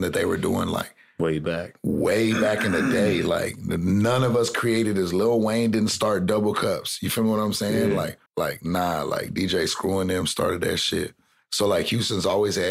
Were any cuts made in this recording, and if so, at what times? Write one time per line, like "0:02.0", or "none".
0:08.3